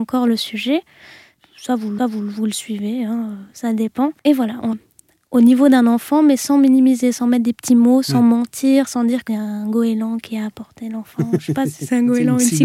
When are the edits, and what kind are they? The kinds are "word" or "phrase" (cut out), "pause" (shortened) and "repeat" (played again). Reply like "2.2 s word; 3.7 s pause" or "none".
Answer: 2.0 s repeat; 4.2 s pause; 4.7 s word; 9.3 s word